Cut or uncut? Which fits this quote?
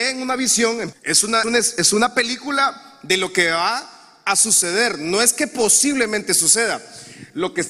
cut